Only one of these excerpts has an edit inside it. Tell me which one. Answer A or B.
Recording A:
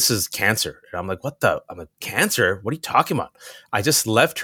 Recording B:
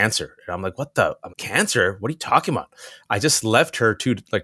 B